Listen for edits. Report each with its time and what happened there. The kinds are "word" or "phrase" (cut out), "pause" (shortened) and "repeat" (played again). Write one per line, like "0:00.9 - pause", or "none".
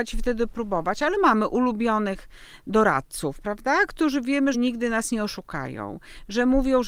0:01.2 - word
0:04.5 - word